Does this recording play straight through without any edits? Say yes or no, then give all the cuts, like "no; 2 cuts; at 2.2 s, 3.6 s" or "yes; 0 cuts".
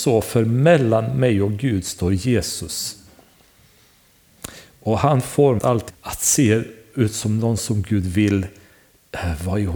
no; 2 cuts; at 5.6 s, 5.9 s